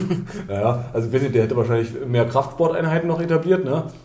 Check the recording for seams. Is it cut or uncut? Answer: uncut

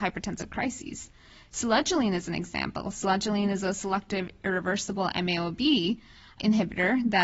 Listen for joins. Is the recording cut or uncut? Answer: uncut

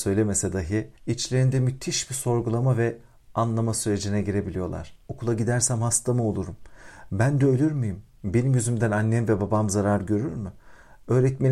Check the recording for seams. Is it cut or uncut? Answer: cut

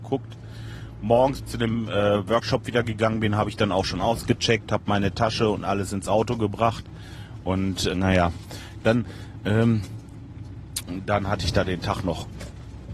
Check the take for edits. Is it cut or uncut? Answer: cut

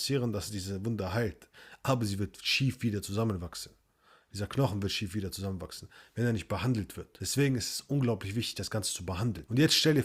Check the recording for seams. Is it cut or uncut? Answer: uncut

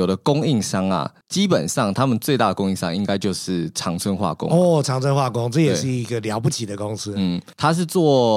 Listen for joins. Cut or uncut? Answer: cut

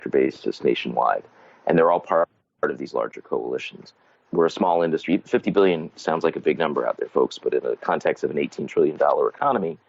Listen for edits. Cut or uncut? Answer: uncut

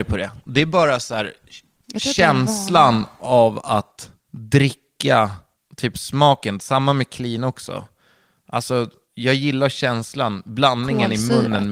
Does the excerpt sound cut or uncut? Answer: uncut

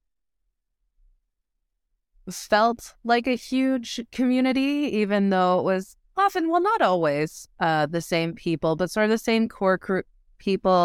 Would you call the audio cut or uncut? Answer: uncut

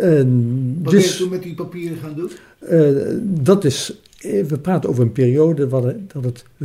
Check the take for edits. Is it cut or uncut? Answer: uncut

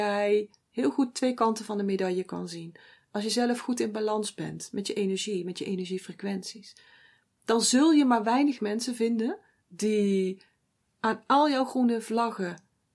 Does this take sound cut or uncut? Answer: uncut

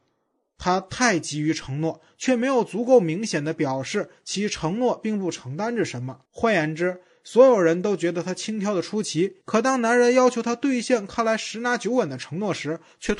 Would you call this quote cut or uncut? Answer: cut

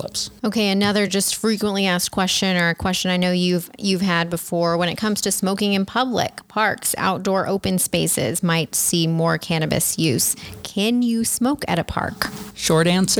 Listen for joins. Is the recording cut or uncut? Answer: uncut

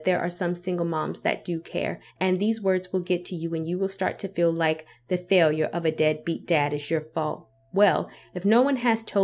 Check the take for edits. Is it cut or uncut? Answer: cut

